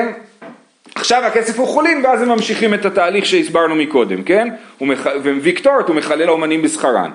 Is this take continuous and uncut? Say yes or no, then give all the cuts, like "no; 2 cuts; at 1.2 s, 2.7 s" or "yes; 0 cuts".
no; 1 cut; at 6.2 s